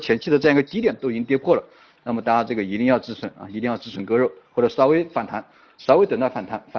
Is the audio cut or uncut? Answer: uncut